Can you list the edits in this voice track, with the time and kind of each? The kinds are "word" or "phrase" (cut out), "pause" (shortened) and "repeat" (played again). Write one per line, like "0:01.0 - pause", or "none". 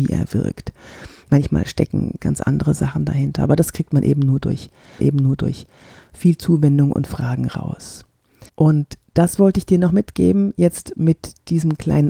0:02.2 - word
0:05.0 - repeat
0:08.5 - pause